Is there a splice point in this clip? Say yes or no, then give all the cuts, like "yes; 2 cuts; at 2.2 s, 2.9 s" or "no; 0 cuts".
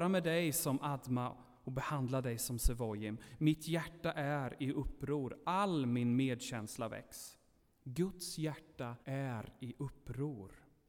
yes; 2 cuts; at 7.6 s, 9.0 s